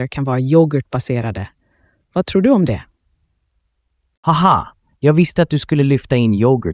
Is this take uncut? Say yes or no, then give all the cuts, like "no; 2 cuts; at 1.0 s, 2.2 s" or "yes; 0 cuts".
yes; 0 cuts